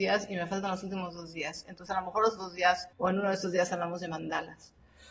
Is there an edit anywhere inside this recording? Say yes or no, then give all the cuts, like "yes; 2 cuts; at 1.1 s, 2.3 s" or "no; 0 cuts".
yes; 2 cuts; at 2.4 s, 2.9 s